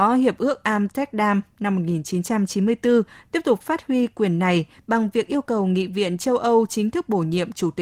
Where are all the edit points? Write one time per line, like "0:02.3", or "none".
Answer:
none